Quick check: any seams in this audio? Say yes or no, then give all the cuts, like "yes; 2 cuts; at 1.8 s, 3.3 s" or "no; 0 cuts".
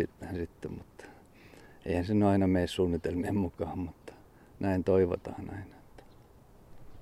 no; 0 cuts